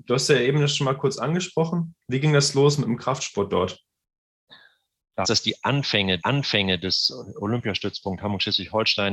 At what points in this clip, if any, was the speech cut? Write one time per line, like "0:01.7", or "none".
0:05.2
0:06.2